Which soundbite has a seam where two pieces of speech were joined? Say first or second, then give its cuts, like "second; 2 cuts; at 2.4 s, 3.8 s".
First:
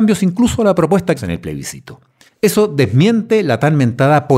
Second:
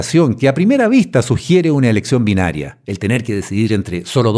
first; 2 cuts; at 1.2 s, 2.3 s